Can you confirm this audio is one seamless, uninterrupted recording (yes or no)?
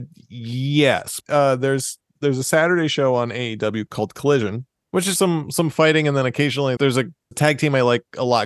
no